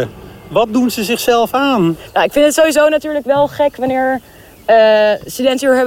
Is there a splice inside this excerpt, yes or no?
no